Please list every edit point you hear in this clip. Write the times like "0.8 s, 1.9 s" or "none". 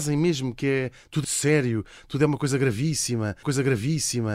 1.2 s, 3.4 s